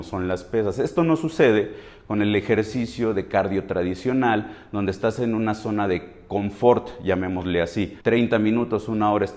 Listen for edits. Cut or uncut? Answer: cut